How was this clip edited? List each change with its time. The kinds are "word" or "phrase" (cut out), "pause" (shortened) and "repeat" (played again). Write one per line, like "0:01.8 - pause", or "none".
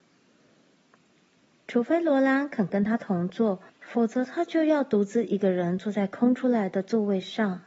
0:03.7 - pause